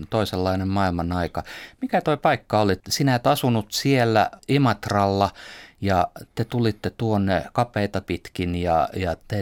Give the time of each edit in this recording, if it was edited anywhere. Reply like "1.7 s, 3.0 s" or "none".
4.4 s, 8.0 s

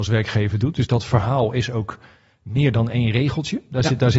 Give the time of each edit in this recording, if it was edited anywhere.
none

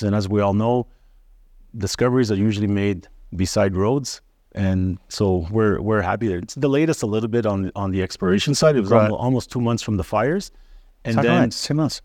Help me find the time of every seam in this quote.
none

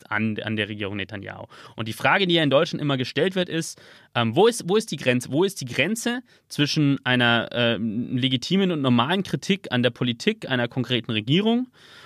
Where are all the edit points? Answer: none

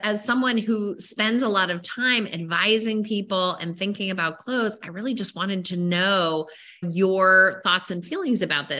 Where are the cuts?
none

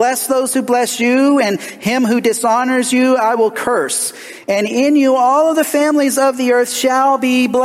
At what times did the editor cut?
none

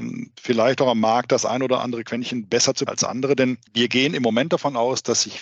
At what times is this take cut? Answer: 2.9 s, 3.7 s

